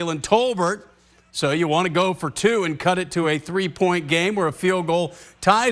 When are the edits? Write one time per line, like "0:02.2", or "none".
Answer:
none